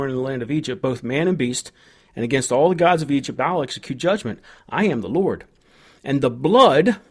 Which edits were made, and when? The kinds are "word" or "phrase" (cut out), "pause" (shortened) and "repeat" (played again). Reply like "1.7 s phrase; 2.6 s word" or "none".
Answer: none